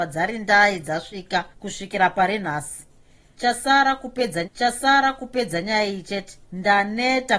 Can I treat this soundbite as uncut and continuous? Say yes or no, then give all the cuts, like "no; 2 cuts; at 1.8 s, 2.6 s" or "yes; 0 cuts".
no; 3 cuts; at 1.5 s, 4.4 s, 6.4 s